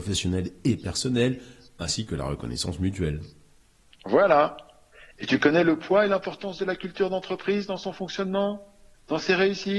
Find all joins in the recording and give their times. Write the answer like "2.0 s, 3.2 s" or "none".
none